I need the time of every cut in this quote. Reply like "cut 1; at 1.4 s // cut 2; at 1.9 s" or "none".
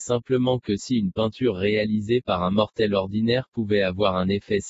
none